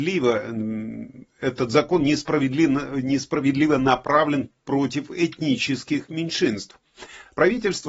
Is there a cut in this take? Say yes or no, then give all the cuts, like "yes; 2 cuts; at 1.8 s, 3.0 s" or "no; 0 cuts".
no; 0 cuts